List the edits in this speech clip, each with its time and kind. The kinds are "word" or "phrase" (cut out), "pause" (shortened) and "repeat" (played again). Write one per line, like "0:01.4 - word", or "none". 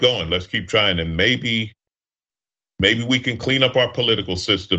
none